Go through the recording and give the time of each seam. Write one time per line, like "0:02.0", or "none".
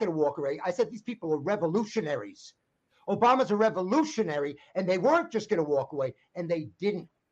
none